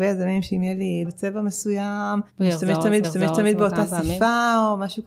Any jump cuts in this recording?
yes; 3 cuts; at 1.0 s, 2.3 s, 3.0 s

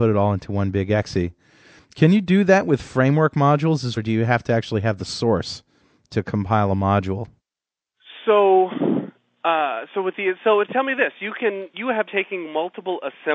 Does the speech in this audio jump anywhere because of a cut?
yes; 3 cuts; at 4.0 s, 11.7 s, 12.1 s

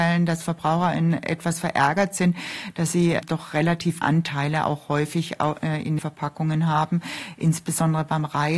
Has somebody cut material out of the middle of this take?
yes; 2 cuts; at 4.0 s, 6.0 s

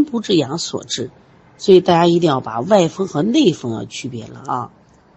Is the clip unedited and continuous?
yes; 0 cuts

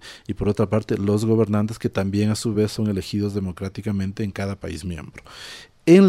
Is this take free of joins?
yes; 0 cuts

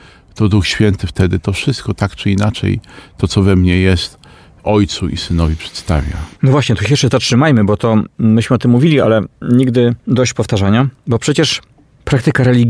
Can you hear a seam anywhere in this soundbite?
no; 0 cuts

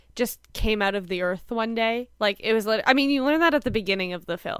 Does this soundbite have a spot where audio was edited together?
yes; 1 cut; at 2.1 s

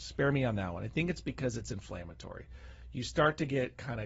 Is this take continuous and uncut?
yes; 0 cuts

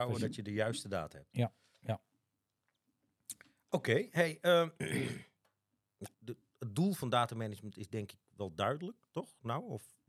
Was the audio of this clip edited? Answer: yes; 2 cuts; at 3.4 s, 6.1 s

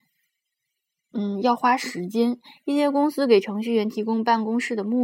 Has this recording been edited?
no; 0 cuts

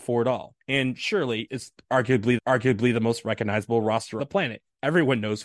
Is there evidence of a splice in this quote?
yes; 3 cuts; at 1.5 s, 2.4 s, 4.2 s

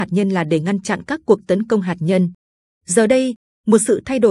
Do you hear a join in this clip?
no; 0 cuts

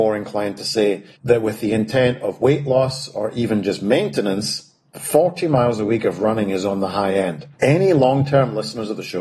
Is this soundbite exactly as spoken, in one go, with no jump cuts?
no; 2 cuts; at 1.2 s, 7.5 s

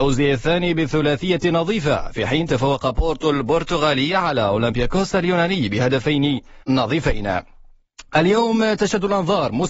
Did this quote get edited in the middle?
yes; 1 cut; at 6.6 s

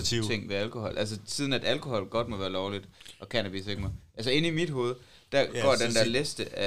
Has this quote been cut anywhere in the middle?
no; 0 cuts

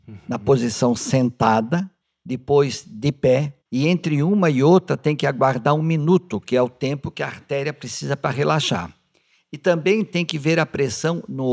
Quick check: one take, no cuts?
no; 2 cuts; at 2.0 s, 3.6 s

